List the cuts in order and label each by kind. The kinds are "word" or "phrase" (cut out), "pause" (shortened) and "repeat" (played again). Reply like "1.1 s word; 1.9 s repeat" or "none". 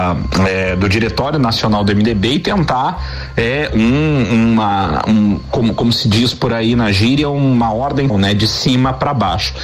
8.1 s word

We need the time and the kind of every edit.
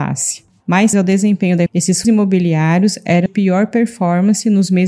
0.9 s word; 1.7 s word; 2.0 s word; 3.3 s word

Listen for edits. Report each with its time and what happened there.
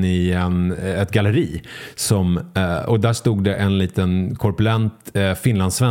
none

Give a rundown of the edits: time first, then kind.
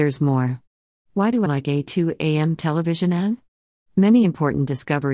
1.5 s phrase

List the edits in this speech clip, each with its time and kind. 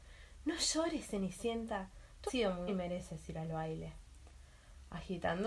2.3 s word; 2.7 s word

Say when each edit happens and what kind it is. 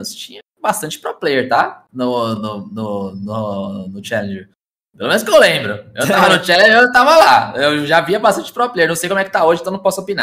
2.4 s word

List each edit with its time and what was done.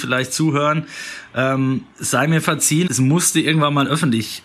2.9 s phrase

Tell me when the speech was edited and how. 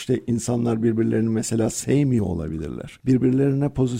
none

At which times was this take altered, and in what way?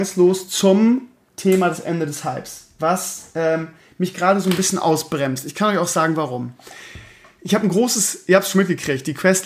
none

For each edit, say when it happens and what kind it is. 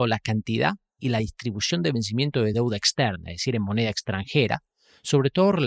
none

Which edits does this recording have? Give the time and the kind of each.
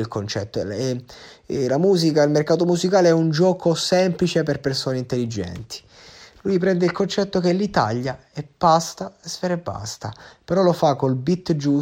none

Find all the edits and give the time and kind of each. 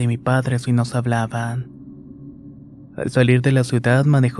none

